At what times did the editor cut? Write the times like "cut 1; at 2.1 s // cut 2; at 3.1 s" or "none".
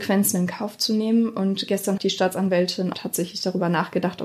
cut 1; at 2.0 s // cut 2; at 2.9 s